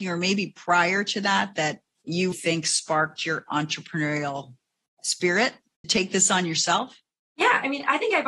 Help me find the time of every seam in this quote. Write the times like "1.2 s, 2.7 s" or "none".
2.3 s, 5.8 s